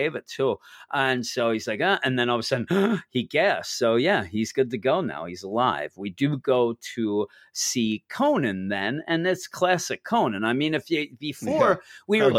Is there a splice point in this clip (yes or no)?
no